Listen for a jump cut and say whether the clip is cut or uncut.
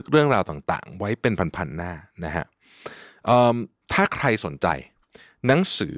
uncut